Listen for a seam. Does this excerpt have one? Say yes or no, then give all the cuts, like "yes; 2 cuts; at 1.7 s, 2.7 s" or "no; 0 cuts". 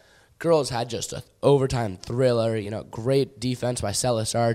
no; 0 cuts